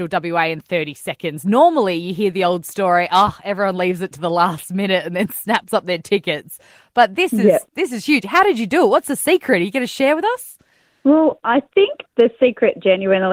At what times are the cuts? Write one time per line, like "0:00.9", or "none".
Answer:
none